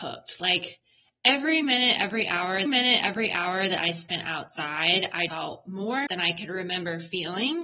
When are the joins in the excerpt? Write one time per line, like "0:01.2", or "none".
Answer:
0:02.7
0:05.3
0:06.1